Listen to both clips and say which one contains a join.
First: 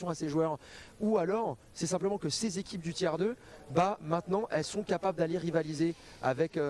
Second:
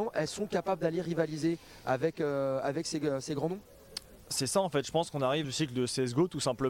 second; 1 cut; at 5.4 s

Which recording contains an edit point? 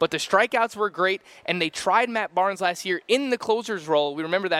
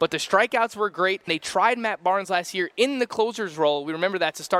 second; 1 cut; at 1.3 s

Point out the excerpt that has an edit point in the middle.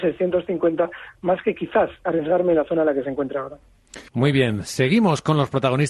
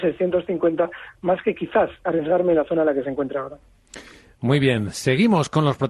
first; 1 cut; at 4.1 s

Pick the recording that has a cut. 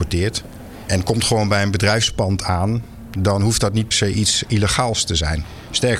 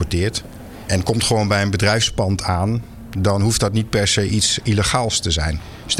first; 1 cut; at 3.9 s

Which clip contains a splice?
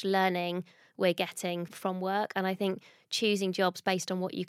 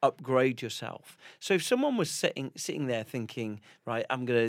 first; 1 cut; at 1.7 s

